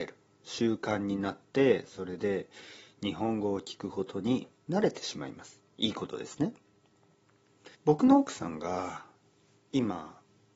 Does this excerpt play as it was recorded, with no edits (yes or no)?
no